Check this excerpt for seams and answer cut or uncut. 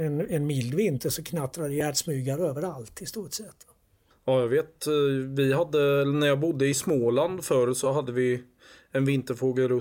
uncut